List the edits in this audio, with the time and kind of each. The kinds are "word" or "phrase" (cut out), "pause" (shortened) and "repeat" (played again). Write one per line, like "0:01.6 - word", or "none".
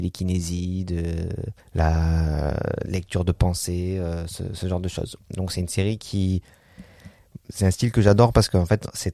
0:01.6 - pause